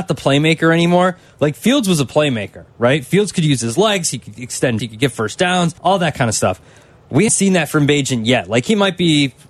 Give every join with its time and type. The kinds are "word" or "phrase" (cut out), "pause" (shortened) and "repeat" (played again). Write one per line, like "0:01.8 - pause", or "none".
0:04.8 - word
0:05.8 - pause
0:07.3 - word